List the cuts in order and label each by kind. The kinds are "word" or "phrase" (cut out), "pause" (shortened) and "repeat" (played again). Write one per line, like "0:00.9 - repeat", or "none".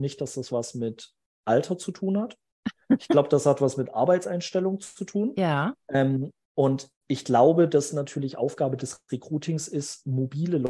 none